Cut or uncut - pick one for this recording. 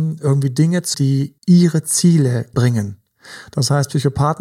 cut